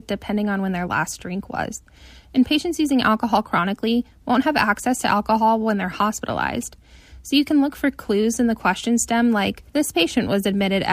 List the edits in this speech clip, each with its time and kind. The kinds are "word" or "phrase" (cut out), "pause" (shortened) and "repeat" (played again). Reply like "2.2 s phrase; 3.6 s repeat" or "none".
9.7 s pause